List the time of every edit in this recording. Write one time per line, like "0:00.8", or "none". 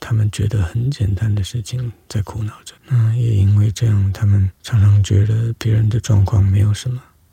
0:02.8
0:04.5